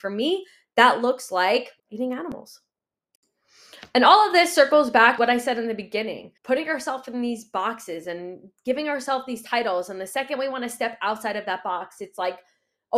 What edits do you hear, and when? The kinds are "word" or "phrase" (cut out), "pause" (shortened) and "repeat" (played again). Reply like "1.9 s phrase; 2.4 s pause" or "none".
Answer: 1.8 s pause; 5.2 s word; 6.4 s pause